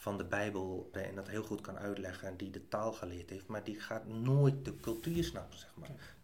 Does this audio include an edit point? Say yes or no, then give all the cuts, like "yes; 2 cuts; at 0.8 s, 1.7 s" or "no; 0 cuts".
yes; 1 cut; at 0.9 s